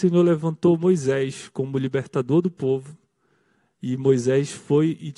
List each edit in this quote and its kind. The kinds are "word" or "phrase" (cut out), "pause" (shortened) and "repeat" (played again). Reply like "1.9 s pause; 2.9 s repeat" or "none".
none